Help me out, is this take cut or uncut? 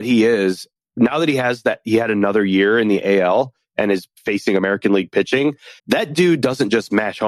cut